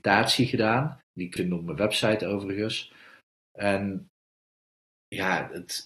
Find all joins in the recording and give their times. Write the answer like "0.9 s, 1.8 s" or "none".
1.0 s, 1.4 s